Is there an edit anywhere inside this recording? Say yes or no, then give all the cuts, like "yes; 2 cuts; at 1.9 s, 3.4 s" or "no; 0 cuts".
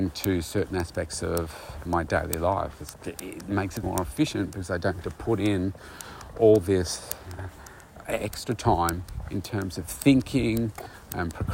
yes; 5 cuts; at 1.9 s, 2.9 s, 3.8 s, 5.0 s, 8.0 s